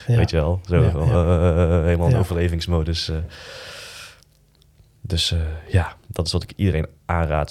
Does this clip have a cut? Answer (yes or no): no